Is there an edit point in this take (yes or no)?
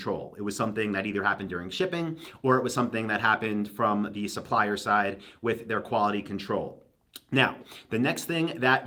no